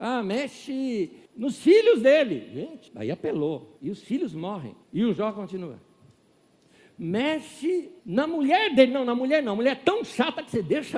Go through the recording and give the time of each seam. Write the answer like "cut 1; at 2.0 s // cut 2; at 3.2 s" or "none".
cut 1; at 1.3 s // cut 2; at 2.9 s // cut 3; at 3.8 s // cut 4; at 4.8 s // cut 5; at 8.0 s